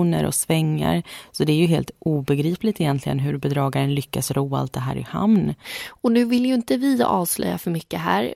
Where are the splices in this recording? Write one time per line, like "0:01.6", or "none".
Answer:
none